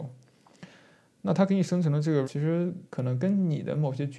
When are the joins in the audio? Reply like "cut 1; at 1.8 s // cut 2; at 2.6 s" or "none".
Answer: cut 1; at 2.2 s // cut 2; at 2.9 s